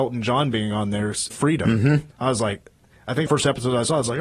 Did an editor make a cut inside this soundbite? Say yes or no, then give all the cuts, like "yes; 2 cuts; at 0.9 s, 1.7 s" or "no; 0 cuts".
yes; 3 cuts; at 1.3 s, 2.1 s, 3.3 s